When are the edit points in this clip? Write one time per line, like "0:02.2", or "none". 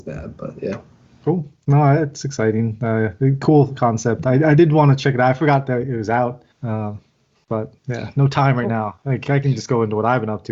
0:06.5
0:07.8